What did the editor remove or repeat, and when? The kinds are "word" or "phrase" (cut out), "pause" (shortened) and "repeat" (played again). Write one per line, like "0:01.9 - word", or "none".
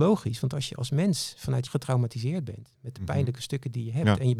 0:01.7 - phrase